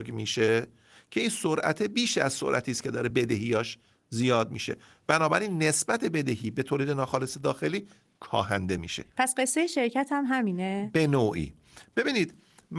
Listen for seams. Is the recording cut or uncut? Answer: uncut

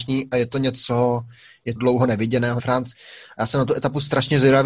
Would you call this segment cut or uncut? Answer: cut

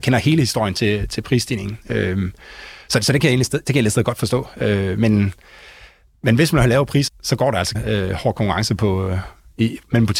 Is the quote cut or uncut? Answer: cut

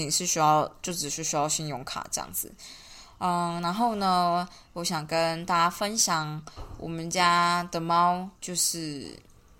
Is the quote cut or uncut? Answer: cut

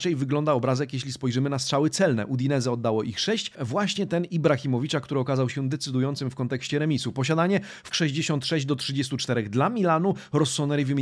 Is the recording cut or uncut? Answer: cut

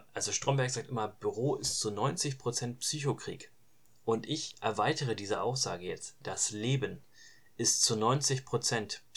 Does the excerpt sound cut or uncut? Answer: uncut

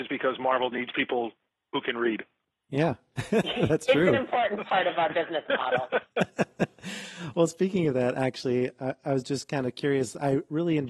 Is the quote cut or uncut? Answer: uncut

